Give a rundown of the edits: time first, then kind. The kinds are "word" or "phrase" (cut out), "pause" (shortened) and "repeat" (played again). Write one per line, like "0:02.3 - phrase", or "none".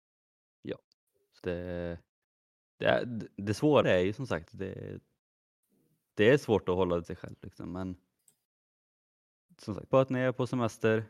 0:01.4 - word
0:03.8 - word
0:04.5 - word
0:07.0 - word
0:09.9 - word